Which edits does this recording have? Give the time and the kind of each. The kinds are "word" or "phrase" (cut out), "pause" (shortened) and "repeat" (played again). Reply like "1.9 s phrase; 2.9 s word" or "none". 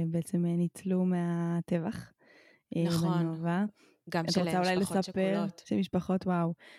none